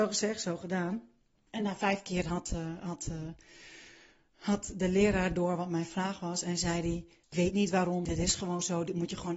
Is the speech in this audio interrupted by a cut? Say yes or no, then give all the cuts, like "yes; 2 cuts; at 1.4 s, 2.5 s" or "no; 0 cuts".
no; 0 cuts